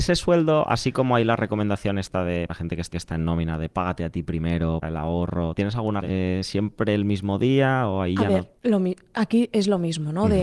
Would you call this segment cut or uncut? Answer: cut